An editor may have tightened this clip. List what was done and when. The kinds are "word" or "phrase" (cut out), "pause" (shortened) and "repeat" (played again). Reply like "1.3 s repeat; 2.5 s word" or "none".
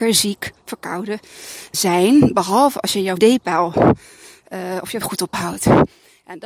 1.7 s word; 3.2 s word; 5.0 s word; 5.3 s word